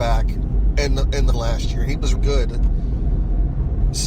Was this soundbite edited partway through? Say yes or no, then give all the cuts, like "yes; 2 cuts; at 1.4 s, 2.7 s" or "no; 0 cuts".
yes; 2 cuts; at 1.3 s, 2.2 s